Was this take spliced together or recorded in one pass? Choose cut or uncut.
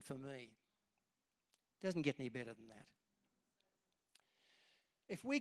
uncut